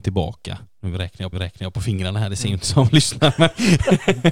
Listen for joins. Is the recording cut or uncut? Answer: cut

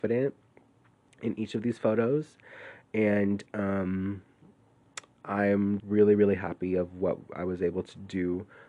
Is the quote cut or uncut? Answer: cut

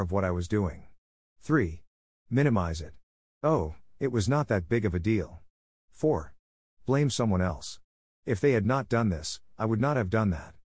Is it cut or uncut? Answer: uncut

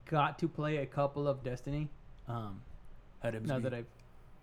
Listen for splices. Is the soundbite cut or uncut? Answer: cut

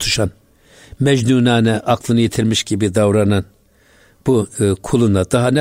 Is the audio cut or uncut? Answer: uncut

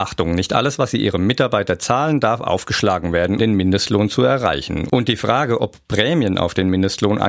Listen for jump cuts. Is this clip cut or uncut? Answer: cut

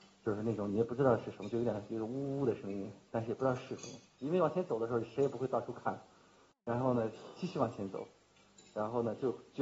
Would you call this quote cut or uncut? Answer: uncut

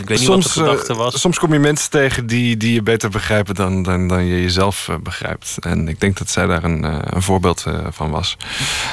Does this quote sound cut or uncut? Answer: uncut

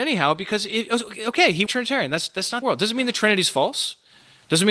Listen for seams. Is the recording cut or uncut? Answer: cut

